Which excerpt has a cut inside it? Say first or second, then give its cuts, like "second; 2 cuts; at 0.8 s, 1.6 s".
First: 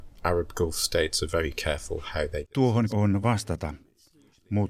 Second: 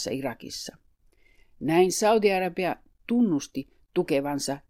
first; 2 cuts; at 2.9 s, 3.2 s